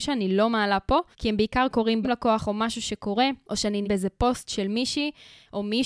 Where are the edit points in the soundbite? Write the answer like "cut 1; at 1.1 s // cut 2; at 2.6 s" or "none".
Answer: cut 1; at 1.1 s // cut 2; at 2.0 s // cut 3; at 3.8 s